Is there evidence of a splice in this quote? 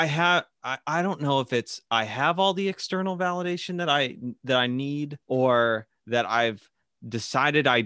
yes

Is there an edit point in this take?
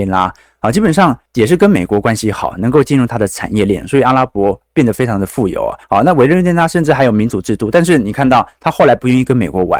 yes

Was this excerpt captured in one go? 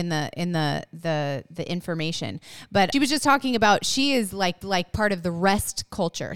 no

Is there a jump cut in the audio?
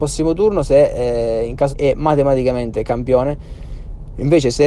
yes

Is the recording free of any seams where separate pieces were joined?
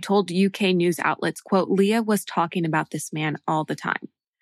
yes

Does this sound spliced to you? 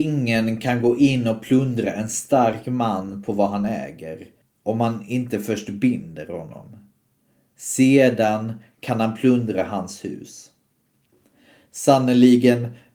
no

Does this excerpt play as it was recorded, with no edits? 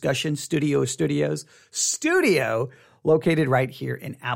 yes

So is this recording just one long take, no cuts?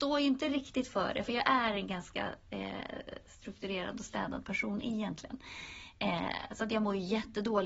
yes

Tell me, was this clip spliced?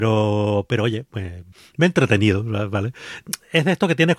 yes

